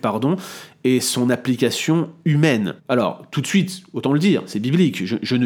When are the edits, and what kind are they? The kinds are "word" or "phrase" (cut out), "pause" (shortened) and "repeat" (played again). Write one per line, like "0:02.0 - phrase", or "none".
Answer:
0:02.8 - pause